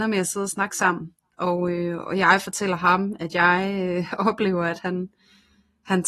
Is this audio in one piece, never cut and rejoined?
yes; 0 cuts

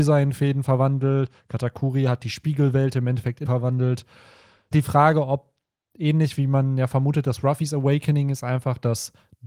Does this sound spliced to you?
yes; 2 cuts; at 3.5 s, 4.7 s

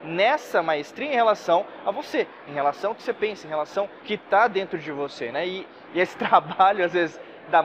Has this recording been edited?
yes; 1 cut; at 4.0 s

